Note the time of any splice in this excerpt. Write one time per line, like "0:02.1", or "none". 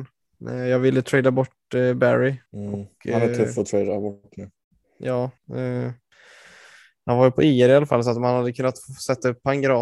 0:02.5
0:05.4